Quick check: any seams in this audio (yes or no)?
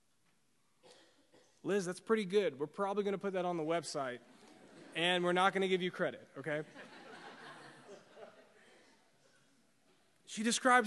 no